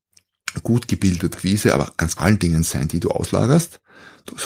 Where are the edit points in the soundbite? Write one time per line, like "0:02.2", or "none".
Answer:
0:01.3
0:02.2